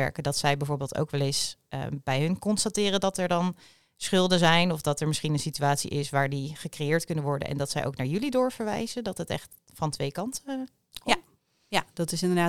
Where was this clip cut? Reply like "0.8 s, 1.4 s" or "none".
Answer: none